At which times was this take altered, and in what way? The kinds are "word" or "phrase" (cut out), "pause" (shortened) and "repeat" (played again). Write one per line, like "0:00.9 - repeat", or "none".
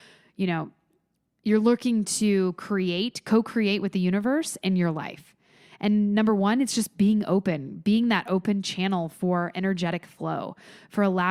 none